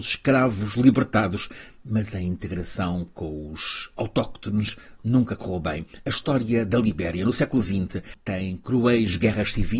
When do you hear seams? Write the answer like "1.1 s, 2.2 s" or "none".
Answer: none